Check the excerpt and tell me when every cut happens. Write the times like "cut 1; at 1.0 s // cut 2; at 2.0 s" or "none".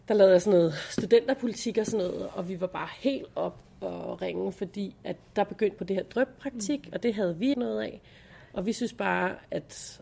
cut 1; at 5.8 s // cut 2; at 7.5 s